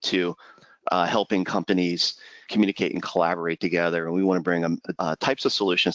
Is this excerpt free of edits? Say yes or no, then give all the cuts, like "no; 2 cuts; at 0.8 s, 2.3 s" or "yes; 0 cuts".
no; 2 cuts; at 2.4 s, 4.9 s